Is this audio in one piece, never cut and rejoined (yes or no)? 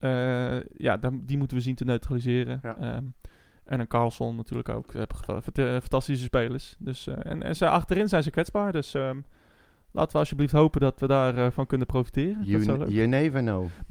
yes